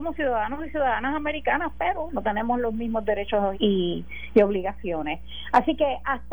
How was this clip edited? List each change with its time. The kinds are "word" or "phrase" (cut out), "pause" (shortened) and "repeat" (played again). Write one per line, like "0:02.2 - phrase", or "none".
0:03.5 - word